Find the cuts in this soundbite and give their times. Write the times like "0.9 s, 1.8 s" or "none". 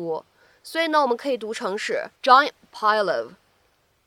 2.2 s

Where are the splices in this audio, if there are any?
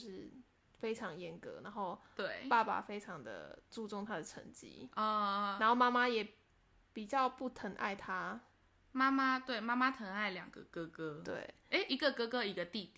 none

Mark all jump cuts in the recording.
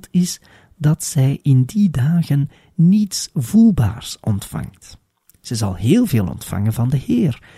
none

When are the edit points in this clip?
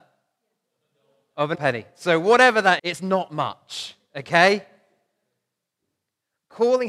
1.5 s, 2.8 s

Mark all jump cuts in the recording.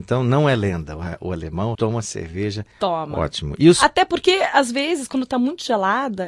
1.7 s, 2.7 s

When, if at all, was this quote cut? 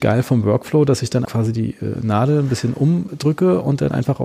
1.2 s

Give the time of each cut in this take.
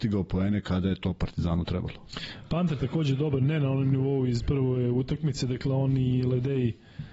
none

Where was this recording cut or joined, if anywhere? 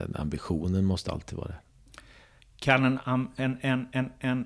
none

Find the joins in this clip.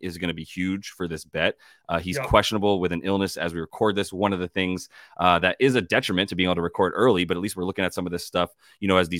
none

